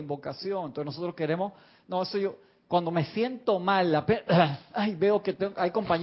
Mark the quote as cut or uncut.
uncut